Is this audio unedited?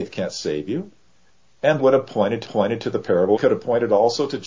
no; 3 cuts; at 1.8 s, 2.4 s, 3.4 s

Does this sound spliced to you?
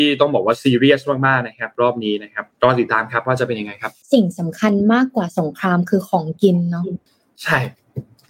yes; 3 cuts; at 2.5 s, 4.0 s, 7.1 s

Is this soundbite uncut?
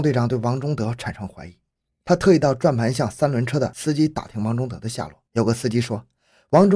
no; 1 cut; at 5.3 s

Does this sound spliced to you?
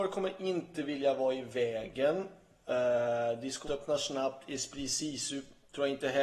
yes; 1 cut; at 3.7 s

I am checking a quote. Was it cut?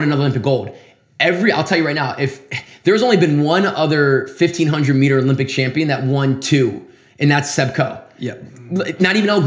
no; 0 cuts

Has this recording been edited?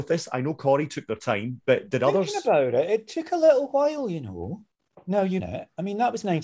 yes; 1 cut; at 5.4 s

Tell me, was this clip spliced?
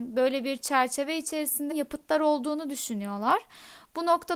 yes; 1 cut; at 1.7 s

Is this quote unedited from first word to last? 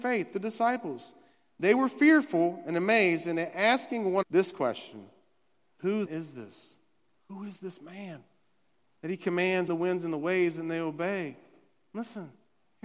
no; 3 cuts; at 4.2 s, 6.1 s, 9.7 s

